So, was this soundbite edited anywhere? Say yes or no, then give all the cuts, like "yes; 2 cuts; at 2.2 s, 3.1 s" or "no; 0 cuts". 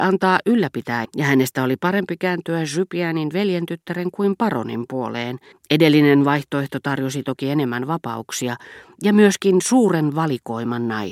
yes; 2 cuts; at 1.0 s, 5.5 s